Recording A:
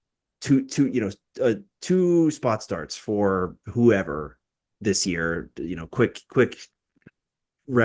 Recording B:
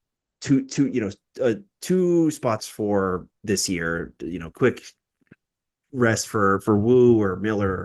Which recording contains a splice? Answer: B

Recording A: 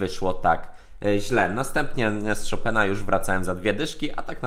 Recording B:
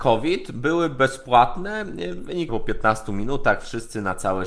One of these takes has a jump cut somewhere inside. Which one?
B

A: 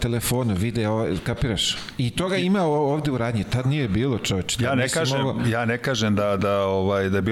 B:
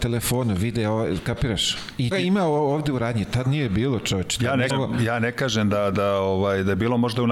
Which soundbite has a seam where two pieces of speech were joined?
B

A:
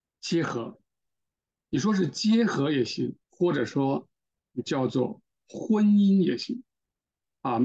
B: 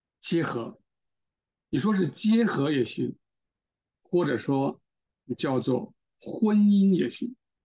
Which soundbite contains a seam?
A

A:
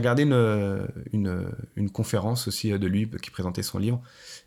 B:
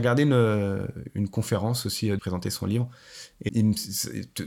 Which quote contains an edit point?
B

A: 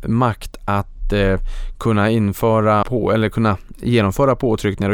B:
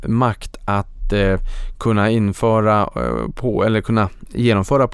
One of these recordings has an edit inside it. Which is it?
A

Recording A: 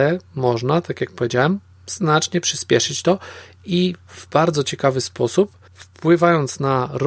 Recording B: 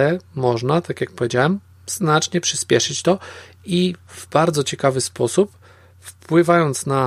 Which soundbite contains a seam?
A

